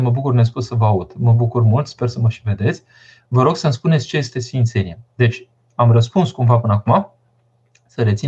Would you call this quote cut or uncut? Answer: uncut